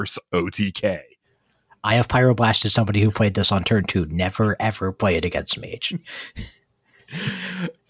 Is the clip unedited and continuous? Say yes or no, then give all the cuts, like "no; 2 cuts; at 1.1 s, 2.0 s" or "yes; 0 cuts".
yes; 0 cuts